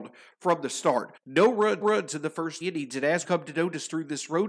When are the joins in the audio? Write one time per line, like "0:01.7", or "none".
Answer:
0:01.2
0:01.8
0:02.6
0:03.2